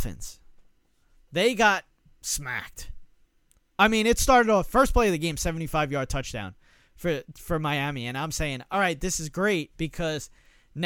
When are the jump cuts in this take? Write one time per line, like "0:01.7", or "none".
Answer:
none

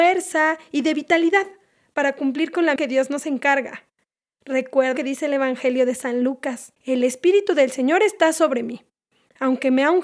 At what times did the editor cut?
0:02.8
0:05.0
0:06.8

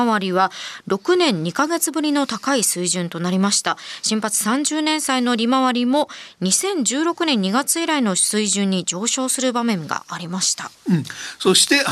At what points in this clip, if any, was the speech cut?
0:10.7

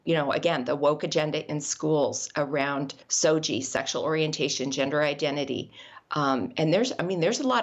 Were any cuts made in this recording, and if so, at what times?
0:03.0

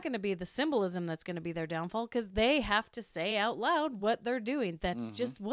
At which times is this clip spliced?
none

